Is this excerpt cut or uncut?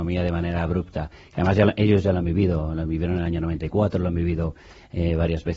uncut